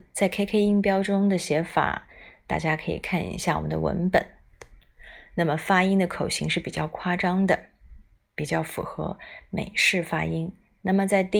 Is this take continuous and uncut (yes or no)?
yes